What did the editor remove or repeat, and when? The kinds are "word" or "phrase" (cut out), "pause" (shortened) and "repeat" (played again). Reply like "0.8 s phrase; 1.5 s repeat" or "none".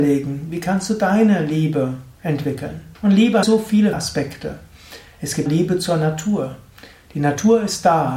2.9 s pause; 3.4 s phrase; 3.9 s word; 5.5 s word